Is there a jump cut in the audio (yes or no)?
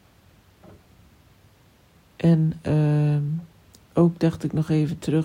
yes